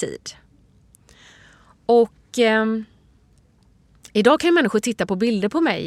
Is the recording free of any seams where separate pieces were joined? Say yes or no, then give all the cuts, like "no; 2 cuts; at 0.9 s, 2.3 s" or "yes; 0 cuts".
yes; 0 cuts